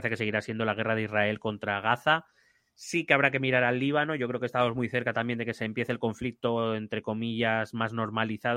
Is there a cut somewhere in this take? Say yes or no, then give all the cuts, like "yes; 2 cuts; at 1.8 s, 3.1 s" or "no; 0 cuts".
no; 0 cuts